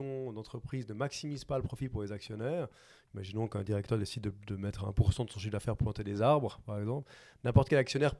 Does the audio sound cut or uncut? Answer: uncut